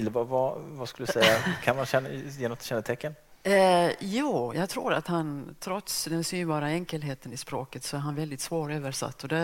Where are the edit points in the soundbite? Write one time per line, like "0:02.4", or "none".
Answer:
none